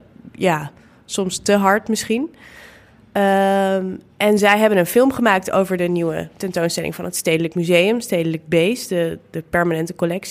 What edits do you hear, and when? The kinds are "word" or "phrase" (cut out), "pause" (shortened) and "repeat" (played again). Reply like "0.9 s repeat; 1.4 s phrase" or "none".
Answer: none